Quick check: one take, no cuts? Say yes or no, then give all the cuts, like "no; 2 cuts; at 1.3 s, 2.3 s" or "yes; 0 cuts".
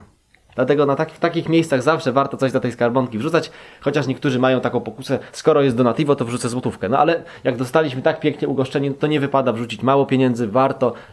yes; 0 cuts